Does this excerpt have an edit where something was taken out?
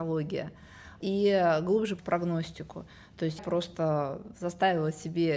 yes; 3 cuts; at 1.0 s, 2.0 s, 3.4 s

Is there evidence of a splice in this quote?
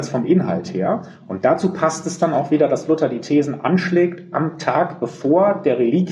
no; 0 cuts

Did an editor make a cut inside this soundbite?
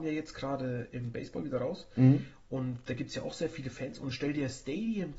no; 0 cuts

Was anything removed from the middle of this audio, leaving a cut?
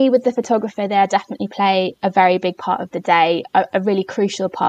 no; 0 cuts

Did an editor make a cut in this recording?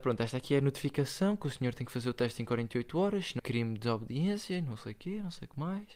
yes; 1 cut; at 3.4 s

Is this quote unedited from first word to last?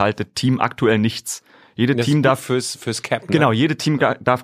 yes; 0 cuts

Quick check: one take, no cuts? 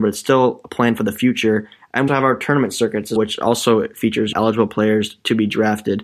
no; 3 cuts; at 2.1 s, 3.2 s, 4.3 s

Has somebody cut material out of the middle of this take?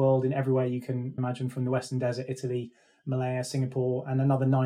no; 0 cuts

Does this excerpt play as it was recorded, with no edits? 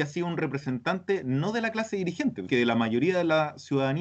no; 1 cut; at 2.5 s

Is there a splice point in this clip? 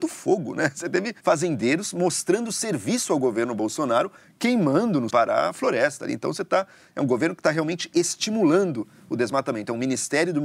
yes; 2 cuts; at 1.2 s, 5.1 s

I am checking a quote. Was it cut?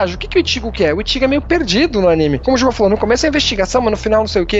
no; 0 cuts

